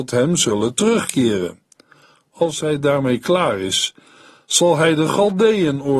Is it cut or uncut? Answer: uncut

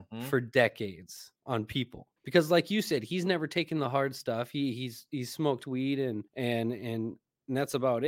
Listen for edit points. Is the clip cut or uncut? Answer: cut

